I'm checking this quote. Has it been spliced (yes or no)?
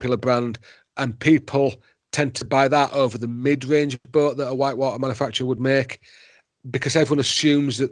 no